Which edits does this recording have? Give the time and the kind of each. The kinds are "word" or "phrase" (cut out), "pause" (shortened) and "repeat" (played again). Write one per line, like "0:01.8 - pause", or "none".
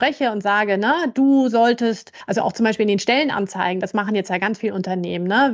none